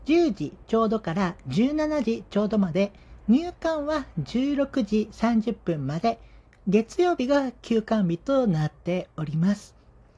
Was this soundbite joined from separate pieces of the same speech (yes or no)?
no